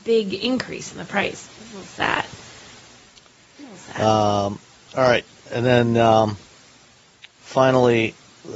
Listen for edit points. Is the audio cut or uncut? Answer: uncut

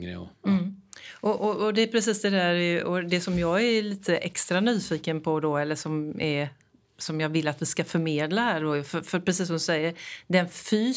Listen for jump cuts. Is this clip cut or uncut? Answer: uncut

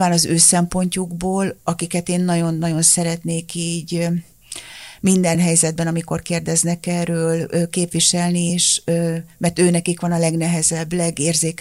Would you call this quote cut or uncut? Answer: uncut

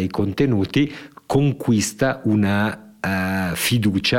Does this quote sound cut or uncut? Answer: uncut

